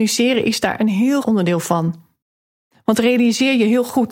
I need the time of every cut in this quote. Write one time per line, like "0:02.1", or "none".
0:01.2